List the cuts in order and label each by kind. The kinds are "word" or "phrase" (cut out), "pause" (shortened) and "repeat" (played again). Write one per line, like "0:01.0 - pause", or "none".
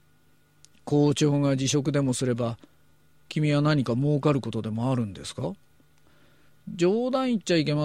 none